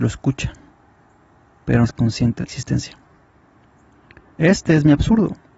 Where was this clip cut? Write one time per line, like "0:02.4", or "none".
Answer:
0:01.8
0:02.4